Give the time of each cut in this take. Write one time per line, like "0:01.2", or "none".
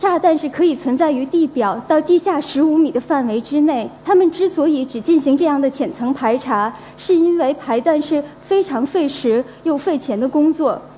0:04.0